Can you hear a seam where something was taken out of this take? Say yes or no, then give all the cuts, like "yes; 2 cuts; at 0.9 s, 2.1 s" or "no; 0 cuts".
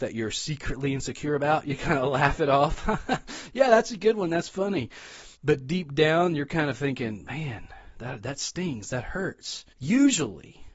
yes; 2 cuts; at 5.3 s, 9.7 s